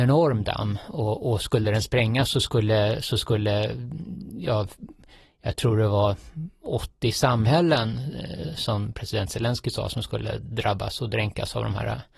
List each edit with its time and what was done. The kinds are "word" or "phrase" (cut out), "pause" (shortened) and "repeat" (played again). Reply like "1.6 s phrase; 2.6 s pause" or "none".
none